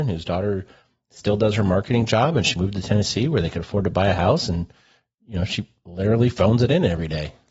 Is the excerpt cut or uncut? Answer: uncut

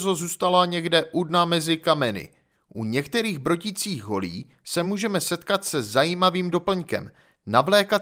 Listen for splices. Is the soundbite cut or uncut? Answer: uncut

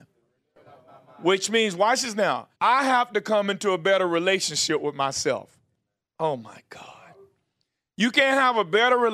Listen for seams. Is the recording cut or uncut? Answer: cut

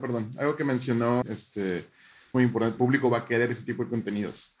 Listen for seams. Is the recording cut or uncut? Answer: cut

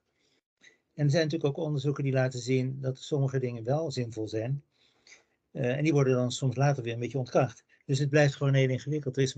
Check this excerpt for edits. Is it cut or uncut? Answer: uncut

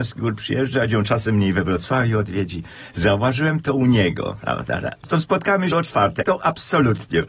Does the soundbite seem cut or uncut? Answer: cut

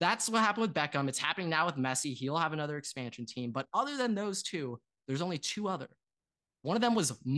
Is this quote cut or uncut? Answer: uncut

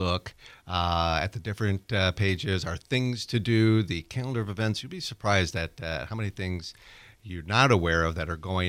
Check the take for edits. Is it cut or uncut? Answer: uncut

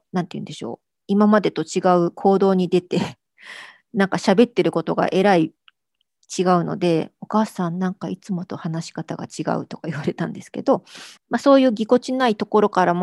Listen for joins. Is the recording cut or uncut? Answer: cut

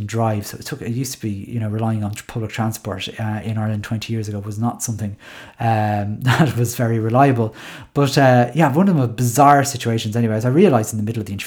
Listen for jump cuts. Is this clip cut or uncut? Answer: uncut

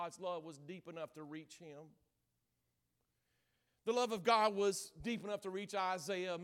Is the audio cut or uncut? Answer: uncut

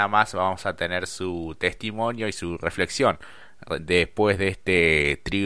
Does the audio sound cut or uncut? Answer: uncut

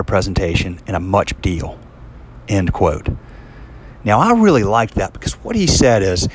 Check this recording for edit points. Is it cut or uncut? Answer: cut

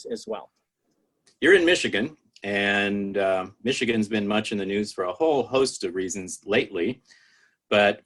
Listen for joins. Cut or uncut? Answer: uncut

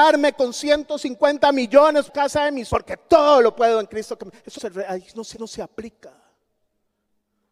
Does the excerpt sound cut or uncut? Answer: cut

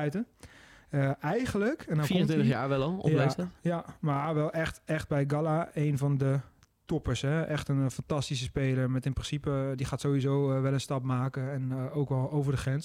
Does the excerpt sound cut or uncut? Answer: uncut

